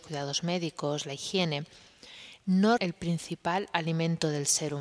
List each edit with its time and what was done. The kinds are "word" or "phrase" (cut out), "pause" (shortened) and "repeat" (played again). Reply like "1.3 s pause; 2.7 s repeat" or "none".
2.8 s word